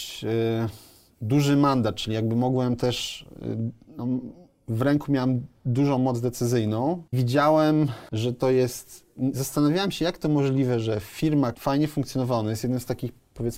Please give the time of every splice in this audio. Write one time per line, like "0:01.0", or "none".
0:07.1
0:11.5